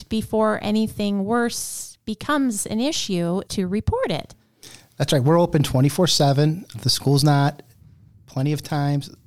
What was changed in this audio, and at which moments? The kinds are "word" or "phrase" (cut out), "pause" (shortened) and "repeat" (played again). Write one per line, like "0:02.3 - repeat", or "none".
0:03.5 - word
0:06.7 - word